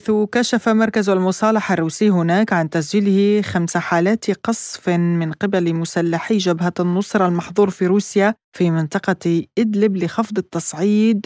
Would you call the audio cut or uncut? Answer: cut